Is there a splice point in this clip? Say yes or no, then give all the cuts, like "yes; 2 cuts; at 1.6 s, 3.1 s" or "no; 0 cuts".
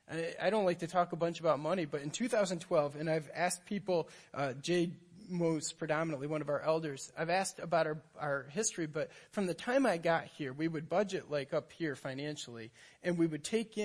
no; 0 cuts